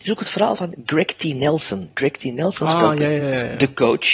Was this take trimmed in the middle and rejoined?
no; 0 cuts

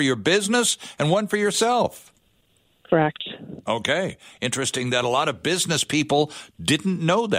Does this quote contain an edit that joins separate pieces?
no; 0 cuts

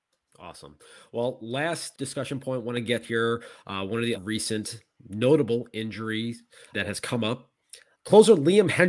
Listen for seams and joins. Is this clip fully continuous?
no; 5 cuts; at 1.9 s, 3.0 s, 4.1 s, 6.7 s, 7.9 s

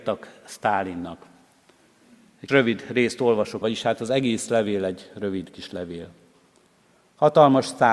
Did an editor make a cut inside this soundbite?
yes; 2 cuts; at 2.5 s, 3.6 s

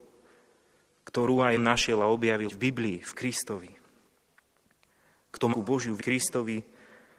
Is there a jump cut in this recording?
yes; 4 cuts; at 1.6 s, 2.5 s, 5.5 s, 6.0 s

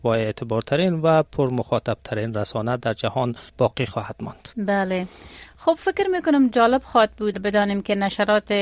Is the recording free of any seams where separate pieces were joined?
no; 3 cuts; at 3.5 s, 4.5 s, 7.3 s

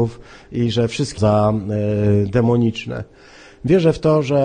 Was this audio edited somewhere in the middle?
yes; 1 cut; at 1.2 s

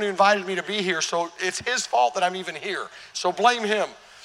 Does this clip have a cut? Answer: no; 0 cuts

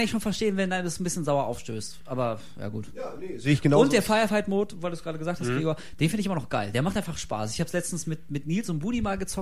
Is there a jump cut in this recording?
no; 0 cuts

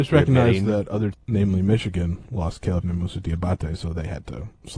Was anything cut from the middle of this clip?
yes; 2 cuts; at 1.1 s, 2.8 s

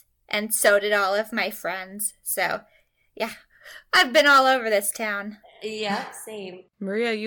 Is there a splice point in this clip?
no; 0 cuts

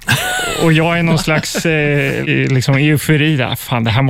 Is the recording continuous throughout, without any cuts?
no; 1 cut; at 2.2 s

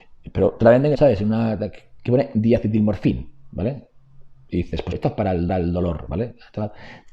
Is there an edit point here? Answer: yes; 3 cuts; at 0.9 s, 4.9 s, 5.5 s

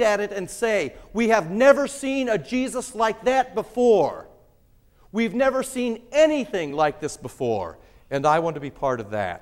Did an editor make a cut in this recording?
no; 0 cuts

